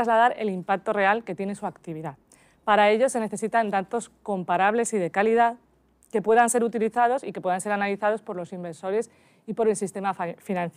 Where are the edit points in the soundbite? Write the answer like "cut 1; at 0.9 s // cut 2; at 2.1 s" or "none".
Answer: none